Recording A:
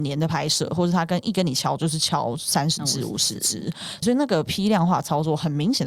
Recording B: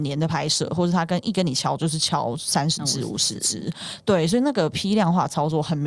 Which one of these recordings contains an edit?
A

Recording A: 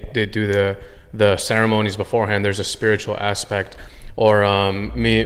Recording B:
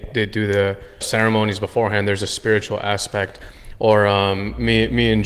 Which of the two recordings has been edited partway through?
B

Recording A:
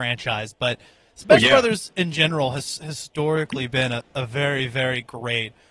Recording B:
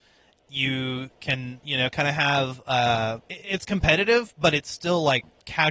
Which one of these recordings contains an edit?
B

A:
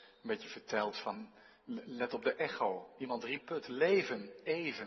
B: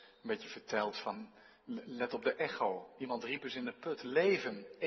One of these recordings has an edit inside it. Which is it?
A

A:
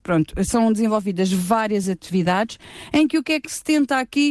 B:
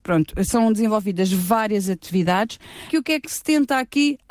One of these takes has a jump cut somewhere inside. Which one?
B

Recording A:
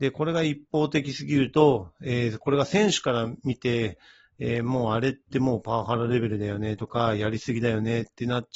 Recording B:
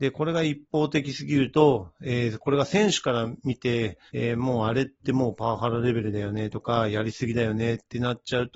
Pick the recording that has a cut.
B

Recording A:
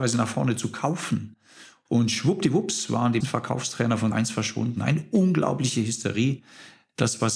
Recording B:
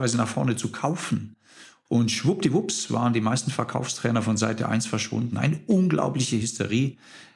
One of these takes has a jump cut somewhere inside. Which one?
A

